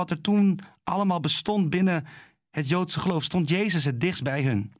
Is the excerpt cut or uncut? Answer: uncut